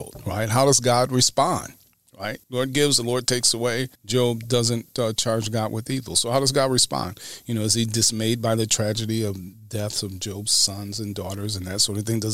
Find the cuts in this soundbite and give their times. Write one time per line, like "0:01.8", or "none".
0:02.4
0:04.0